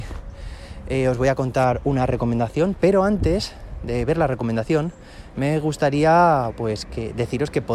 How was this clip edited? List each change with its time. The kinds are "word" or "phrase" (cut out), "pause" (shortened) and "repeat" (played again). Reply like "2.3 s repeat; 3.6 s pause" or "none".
6.5 s word